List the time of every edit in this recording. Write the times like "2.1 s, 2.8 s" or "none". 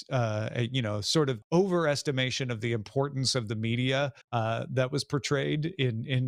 1.4 s, 4.2 s